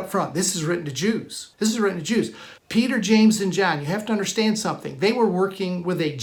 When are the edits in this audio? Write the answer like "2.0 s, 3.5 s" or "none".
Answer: 1.5 s, 2.6 s